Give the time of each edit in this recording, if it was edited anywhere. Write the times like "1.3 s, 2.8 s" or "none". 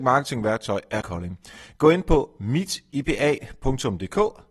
1.0 s